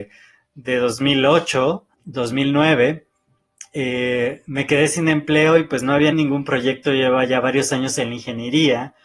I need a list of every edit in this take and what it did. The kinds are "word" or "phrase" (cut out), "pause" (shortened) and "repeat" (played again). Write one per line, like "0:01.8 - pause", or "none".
0:01.9 - pause
0:06.1 - word